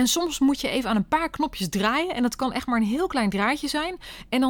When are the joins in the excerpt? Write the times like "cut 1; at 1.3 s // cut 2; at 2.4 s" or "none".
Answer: none